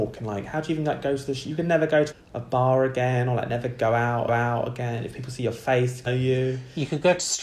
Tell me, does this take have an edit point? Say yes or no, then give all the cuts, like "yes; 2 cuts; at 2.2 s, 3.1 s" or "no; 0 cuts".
yes; 3 cuts; at 2.1 s, 4.3 s, 6.1 s